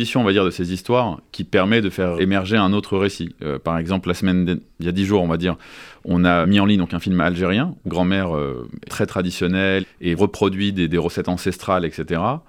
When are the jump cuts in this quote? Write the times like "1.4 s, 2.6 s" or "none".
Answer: 2.2 s, 6.4 s, 7.9 s, 8.9 s, 9.8 s, 10.2 s